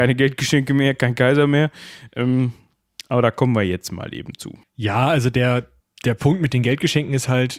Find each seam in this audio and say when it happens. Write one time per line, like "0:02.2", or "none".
none